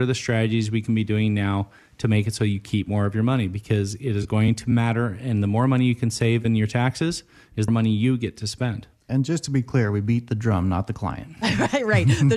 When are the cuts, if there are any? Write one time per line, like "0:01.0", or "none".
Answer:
0:07.7